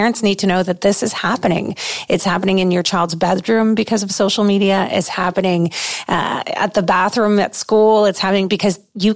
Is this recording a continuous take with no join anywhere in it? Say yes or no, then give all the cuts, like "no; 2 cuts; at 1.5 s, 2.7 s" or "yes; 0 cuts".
yes; 0 cuts